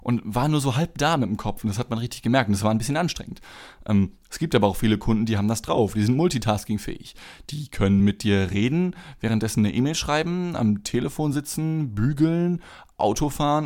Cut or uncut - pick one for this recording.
uncut